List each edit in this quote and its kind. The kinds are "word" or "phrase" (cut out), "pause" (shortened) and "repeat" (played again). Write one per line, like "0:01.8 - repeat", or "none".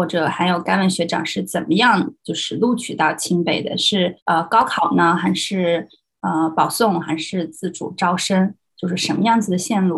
0:04.2 - pause